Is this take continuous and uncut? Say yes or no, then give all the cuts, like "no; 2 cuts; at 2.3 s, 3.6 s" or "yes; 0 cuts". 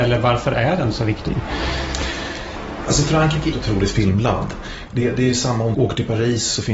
no; 2 cuts; at 3.5 s, 5.7 s